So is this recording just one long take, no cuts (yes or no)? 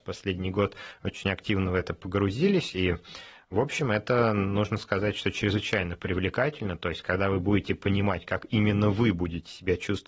yes